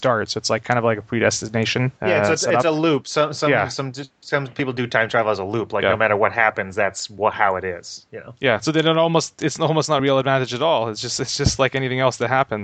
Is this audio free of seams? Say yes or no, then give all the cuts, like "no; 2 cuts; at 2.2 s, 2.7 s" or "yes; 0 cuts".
no; 2 cuts; at 2.0 s, 10.0 s